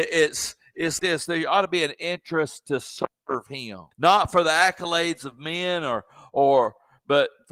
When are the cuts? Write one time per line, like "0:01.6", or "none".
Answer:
0:01.0
0:03.9